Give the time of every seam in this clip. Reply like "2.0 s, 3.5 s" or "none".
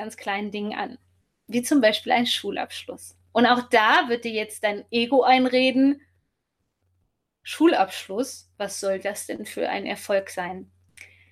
none